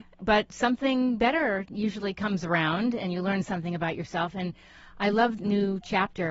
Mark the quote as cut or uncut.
cut